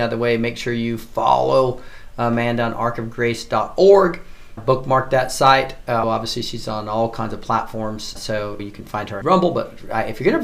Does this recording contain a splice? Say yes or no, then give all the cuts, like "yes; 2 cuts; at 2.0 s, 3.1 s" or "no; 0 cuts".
yes; 5 cuts; at 4.6 s, 6.0 s, 8.2 s, 8.6 s, 9.2 s